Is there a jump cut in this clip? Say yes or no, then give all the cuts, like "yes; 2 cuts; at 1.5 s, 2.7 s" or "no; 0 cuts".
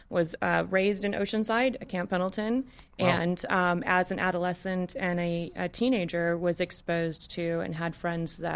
no; 0 cuts